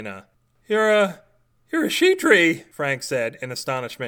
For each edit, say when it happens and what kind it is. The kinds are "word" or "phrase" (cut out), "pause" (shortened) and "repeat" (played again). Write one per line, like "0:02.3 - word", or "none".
none